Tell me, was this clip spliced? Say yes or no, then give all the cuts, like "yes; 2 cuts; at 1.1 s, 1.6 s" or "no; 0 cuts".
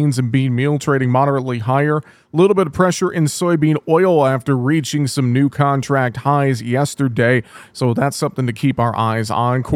no; 0 cuts